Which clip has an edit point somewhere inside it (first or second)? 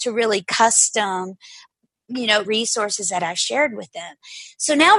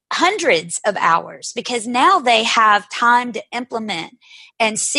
first